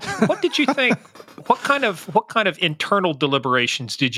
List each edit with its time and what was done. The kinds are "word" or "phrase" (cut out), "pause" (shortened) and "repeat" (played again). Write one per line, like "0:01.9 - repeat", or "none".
none